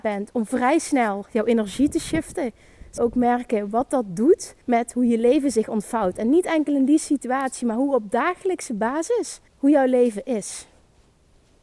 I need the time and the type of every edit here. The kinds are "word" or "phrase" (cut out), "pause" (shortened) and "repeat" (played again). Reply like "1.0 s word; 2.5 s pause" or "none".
3.0 s word; 4.6 s pause; 9.5 s pause